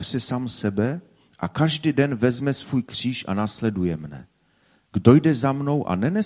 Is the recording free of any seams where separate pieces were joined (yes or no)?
yes